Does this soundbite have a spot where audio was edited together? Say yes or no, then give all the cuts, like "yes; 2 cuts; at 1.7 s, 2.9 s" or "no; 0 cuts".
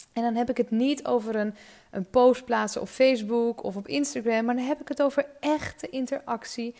no; 0 cuts